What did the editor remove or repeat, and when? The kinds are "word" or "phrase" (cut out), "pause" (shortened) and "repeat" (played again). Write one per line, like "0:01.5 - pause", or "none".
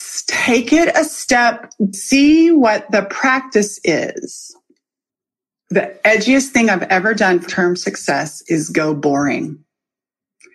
0:01.9 - phrase
0:05.1 - pause
0:07.5 - word